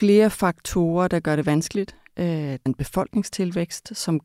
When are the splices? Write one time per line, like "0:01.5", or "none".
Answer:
0:02.7